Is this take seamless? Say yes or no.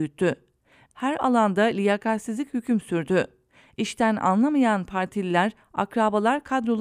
no